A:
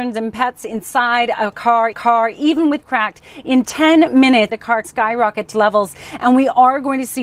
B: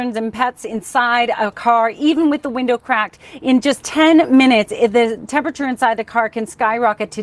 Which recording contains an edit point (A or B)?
A